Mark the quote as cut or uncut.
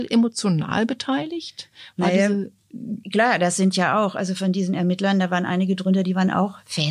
uncut